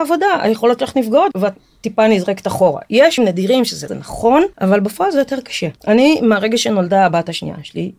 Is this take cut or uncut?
cut